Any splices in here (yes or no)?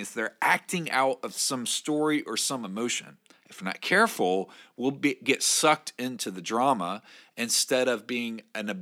yes